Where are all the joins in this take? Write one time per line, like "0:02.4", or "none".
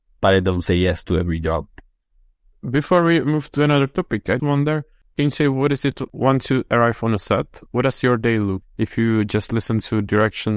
0:04.4
0:06.1
0:07.7
0:08.6